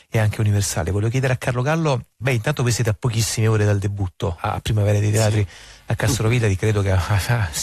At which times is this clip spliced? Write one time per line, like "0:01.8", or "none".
0:02.2
0:04.4